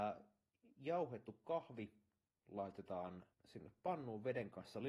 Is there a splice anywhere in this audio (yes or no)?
yes